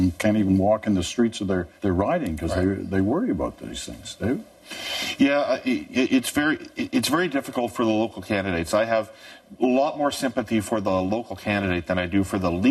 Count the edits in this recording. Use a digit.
1